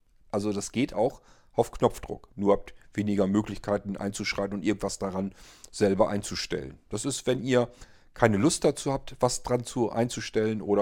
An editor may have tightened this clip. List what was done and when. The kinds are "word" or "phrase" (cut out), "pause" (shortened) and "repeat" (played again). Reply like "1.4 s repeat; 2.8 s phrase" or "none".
none